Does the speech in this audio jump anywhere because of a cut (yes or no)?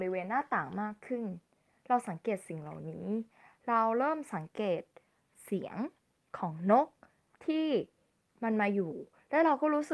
no